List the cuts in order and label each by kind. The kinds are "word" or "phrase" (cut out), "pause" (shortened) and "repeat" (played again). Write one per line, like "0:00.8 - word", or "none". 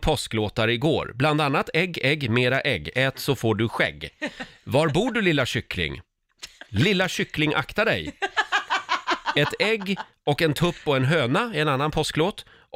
none